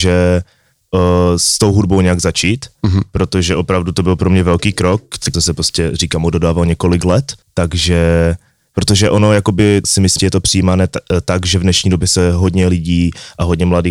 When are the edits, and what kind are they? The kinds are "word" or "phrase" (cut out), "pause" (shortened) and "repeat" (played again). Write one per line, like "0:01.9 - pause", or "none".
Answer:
0:05.3 - phrase
0:07.4 - pause
0:09.8 - word
0:10.2 - phrase